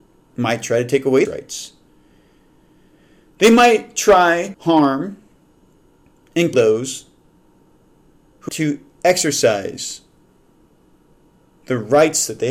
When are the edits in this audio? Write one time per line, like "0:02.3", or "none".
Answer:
0:01.2
0:04.5
0:06.5
0:08.5